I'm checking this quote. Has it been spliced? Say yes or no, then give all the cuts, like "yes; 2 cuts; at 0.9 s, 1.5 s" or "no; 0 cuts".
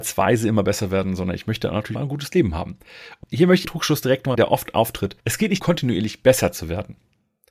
yes; 6 cuts; at 1.9 s, 3.2 s, 3.6 s, 4.3 s, 5.2 s, 5.6 s